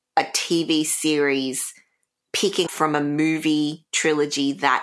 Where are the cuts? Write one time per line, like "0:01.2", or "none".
0:02.7